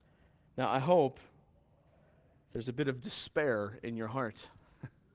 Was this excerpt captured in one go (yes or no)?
yes